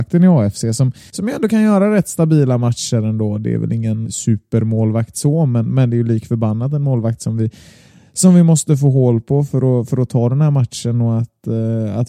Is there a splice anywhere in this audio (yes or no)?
yes